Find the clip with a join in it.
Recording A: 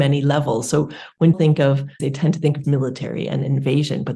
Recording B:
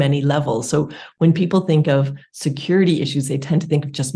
A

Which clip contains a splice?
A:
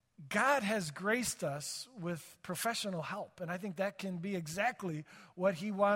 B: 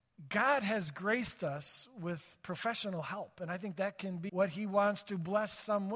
B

